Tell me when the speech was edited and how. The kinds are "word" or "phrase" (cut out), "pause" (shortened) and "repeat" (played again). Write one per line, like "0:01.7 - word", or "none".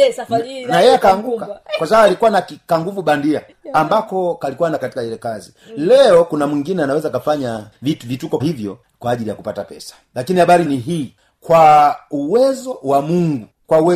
0:04.8 - word
0:08.4 - word
0:10.6 - word